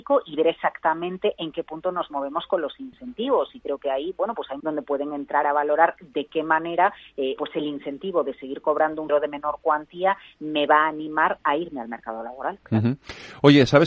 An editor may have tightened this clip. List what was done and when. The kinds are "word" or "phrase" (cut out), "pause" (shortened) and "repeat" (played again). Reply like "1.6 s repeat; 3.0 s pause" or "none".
4.6 s phrase; 7.4 s word; 9.1 s phrase